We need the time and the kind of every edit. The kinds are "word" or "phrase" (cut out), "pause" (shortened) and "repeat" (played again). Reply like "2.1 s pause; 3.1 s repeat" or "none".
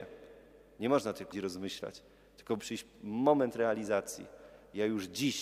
1.3 s word; 2.6 s word